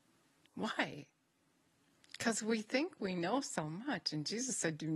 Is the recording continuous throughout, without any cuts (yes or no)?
yes